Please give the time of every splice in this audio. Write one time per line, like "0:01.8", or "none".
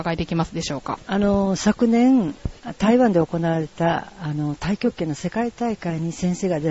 0:01.0